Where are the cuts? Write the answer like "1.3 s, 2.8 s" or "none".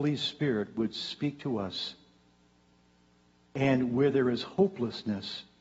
none